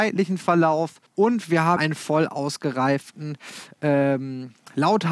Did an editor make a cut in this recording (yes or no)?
yes